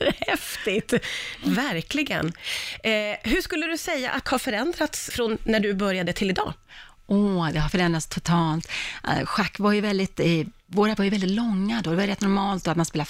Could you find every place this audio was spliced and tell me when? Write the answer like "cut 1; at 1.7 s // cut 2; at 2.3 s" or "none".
cut 1; at 4.2 s // cut 2; at 5.1 s // cut 3; at 7.7 s // cut 4; at 11.0 s